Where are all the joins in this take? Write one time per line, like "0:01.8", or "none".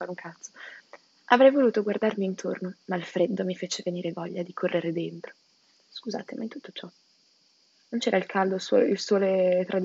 none

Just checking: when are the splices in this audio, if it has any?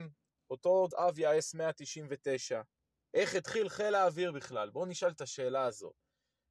0:00.9
0:02.8

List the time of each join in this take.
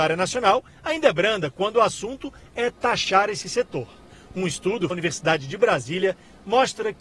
0:04.9

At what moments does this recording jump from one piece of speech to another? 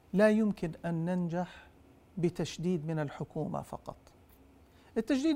0:01.8

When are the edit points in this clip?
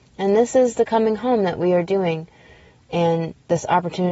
none

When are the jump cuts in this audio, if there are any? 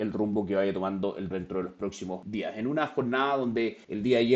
0:01.3

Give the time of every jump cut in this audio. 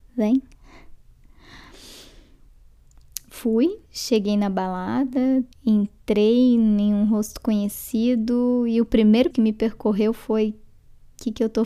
0:03.9
0:05.5
0:09.3

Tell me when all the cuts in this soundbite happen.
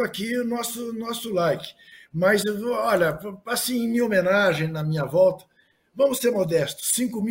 none

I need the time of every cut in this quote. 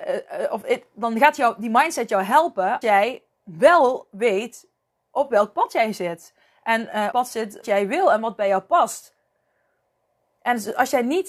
0:02.8
0:03.3
0:07.1
0:07.6

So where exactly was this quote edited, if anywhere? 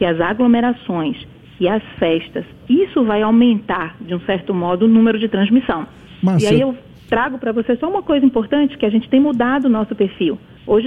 none

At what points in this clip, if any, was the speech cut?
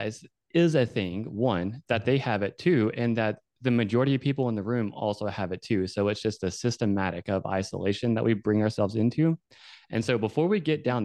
none

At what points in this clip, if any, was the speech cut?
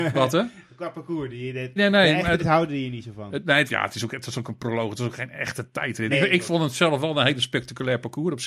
0:01.8
0:02.4
0:03.7
0:06.1

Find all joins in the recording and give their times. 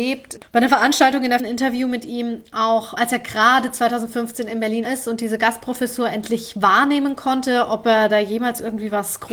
0:01.4
0:03.0
0:04.8

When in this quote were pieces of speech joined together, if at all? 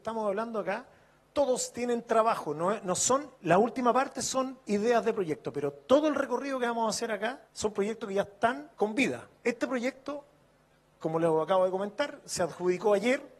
0:03.3
0:04.6
0:07.5
0:08.7
0:09.4

